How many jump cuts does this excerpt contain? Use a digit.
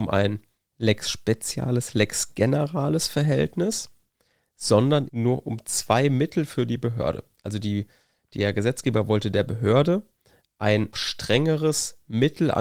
2